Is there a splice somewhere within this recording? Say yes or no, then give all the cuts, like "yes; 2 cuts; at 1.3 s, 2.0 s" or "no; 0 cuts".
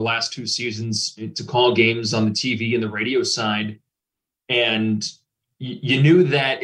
no; 0 cuts